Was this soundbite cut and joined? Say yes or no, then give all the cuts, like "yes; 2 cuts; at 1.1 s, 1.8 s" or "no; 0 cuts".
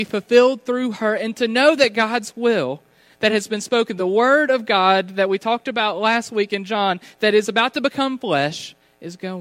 no; 0 cuts